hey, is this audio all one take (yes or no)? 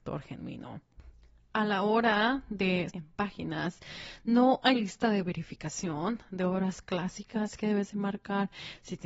no